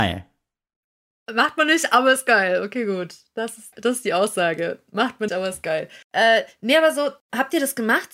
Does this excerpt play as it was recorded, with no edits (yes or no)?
no